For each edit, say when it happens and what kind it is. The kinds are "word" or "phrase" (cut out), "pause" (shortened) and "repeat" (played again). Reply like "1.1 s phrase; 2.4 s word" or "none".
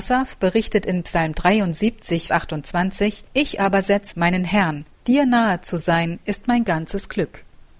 2.3 s word; 3.3 s pause; 4.1 s phrase; 4.9 s pause